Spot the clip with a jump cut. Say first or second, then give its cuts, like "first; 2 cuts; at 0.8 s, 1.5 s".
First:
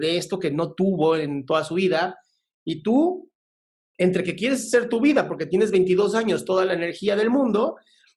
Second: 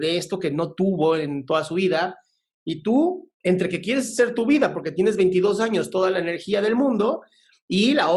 second; 1 cut; at 3.3 s